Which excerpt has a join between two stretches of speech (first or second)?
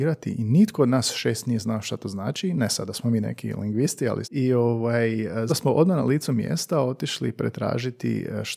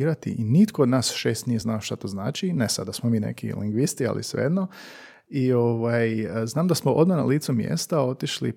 first